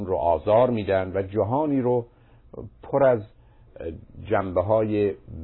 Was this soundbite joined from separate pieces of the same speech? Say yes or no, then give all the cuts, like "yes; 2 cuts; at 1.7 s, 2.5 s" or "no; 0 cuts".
no; 0 cuts